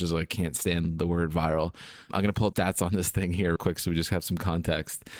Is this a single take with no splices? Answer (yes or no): no